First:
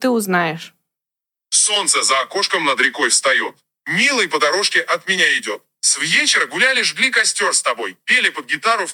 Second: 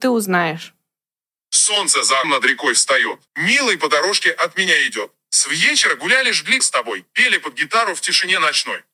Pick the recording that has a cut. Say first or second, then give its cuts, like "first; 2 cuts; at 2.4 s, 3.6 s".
second; 3 cuts; at 2.2 s, 3.3 s, 6.6 s